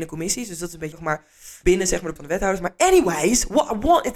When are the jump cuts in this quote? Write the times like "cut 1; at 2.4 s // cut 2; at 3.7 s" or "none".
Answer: cut 1; at 0.9 s // cut 2; at 1.6 s // cut 3; at 2.2 s